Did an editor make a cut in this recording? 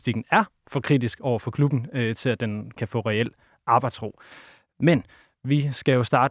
yes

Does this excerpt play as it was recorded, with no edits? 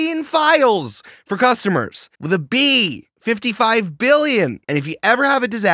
no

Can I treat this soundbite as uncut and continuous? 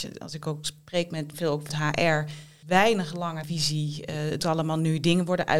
no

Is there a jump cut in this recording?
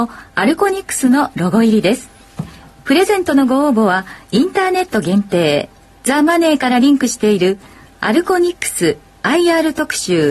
no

